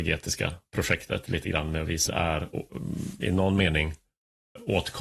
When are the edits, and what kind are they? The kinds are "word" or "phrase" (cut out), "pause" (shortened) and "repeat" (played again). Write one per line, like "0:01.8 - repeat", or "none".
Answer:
0:02.1 - phrase